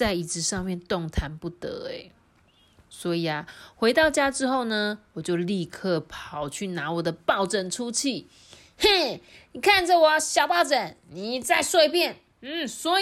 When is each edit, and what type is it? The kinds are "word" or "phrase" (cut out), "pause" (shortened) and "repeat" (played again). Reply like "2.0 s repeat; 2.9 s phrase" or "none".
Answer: none